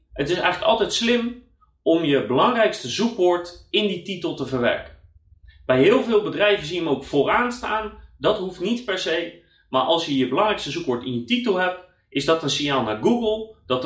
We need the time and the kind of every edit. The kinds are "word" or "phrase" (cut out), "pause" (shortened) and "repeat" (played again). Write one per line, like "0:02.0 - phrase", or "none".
none